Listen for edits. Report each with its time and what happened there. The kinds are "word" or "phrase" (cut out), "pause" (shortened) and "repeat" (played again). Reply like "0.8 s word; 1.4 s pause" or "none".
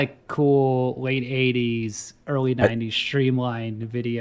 none